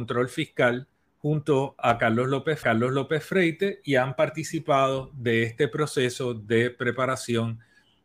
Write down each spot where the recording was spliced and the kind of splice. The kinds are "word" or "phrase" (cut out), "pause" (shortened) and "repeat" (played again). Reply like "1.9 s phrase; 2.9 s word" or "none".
2.6 s repeat